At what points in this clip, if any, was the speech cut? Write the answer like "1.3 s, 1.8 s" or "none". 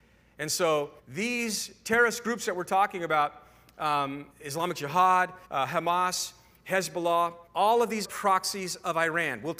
1.0 s, 4.3 s, 5.4 s, 7.5 s, 8.0 s